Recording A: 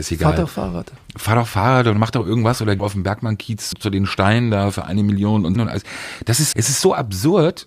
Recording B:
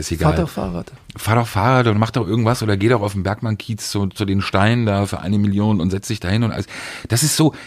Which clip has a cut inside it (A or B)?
A